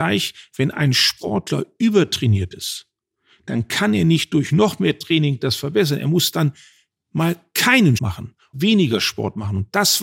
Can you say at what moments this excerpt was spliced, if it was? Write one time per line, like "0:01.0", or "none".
0:08.0
0:08.5

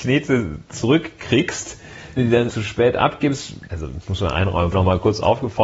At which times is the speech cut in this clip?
0:02.2
0:02.5
0:03.7
0:04.7

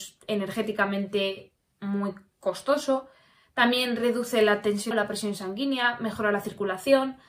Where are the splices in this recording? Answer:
0:04.9

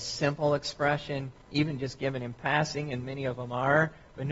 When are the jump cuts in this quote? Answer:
0:01.4

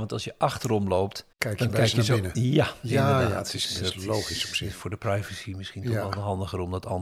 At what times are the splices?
0:01.3

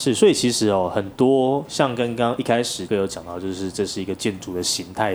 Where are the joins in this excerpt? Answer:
0:02.9

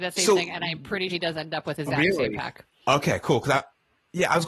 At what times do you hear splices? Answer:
0:01.1
0:01.9

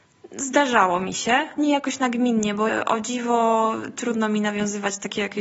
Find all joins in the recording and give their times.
0:01.6
0:02.7

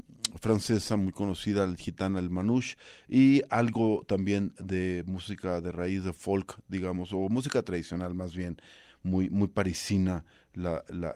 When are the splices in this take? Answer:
none

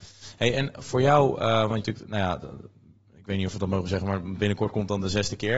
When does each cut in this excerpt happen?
0:01.8

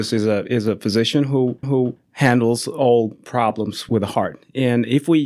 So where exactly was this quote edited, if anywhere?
0:01.6

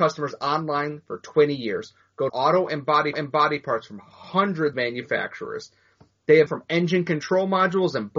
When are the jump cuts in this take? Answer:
0:02.3
0:03.1
0:04.7
0:06.5

